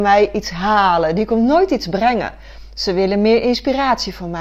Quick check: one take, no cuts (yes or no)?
yes